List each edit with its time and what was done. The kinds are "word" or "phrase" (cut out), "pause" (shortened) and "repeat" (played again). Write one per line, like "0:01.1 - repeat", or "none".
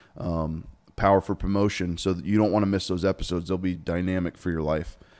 none